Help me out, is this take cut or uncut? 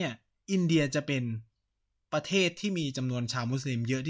uncut